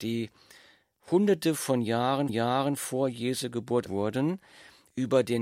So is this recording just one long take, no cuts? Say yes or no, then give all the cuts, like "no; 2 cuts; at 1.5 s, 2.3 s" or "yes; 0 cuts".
no; 2 cuts; at 2.3 s, 3.9 s